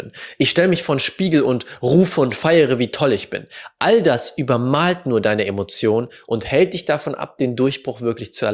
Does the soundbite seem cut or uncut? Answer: uncut